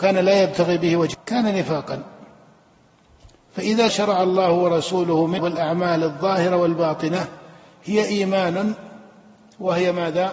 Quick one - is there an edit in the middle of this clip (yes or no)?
yes